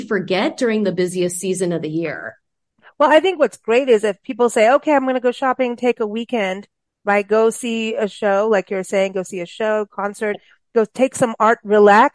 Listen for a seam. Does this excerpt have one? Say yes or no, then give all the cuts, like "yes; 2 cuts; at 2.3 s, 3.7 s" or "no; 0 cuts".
no; 0 cuts